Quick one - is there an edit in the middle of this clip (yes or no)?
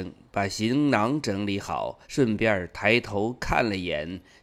yes